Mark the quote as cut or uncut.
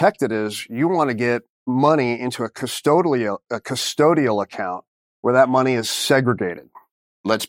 uncut